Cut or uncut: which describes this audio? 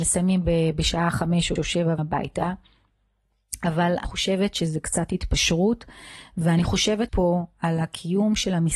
cut